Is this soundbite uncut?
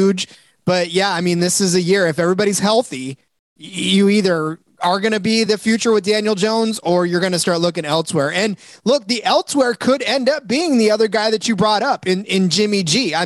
yes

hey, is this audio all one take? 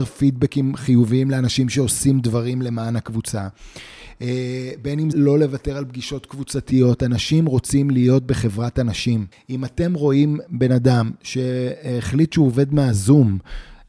no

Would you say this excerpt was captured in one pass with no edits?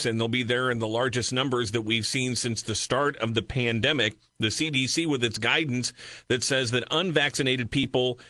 yes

